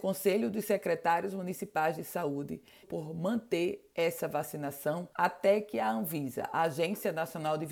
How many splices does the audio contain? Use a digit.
2